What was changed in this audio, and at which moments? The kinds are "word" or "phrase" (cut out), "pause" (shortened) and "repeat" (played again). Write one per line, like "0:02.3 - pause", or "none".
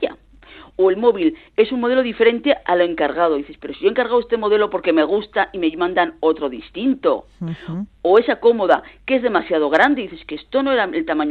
none